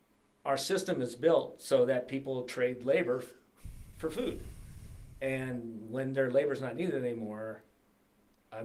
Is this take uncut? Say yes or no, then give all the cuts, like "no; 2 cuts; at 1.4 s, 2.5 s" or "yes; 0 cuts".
yes; 0 cuts